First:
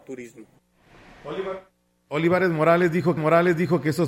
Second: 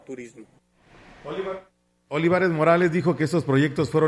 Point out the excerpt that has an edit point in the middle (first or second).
first